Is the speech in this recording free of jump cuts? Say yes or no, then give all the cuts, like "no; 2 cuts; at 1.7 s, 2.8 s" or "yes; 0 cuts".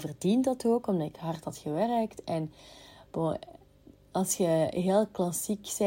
yes; 0 cuts